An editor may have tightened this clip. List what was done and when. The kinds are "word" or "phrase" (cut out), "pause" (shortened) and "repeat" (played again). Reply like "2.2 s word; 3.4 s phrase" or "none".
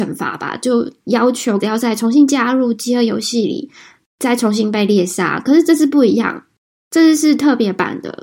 1.6 s word